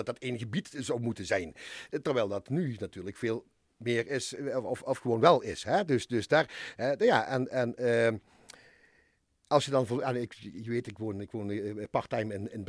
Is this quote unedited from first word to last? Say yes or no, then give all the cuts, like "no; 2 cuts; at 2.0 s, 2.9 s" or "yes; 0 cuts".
yes; 0 cuts